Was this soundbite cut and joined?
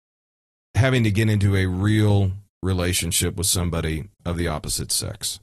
no; 0 cuts

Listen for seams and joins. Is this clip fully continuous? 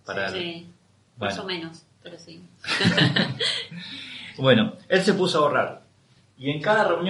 yes; 0 cuts

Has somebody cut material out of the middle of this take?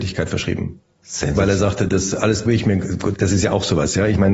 yes; 1 cut; at 2.5 s

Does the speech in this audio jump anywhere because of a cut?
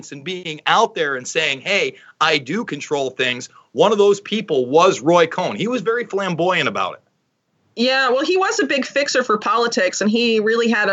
no; 0 cuts

